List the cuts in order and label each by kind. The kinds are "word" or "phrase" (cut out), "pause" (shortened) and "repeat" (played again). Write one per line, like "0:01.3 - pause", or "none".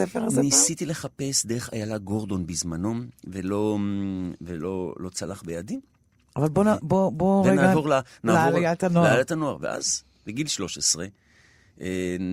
none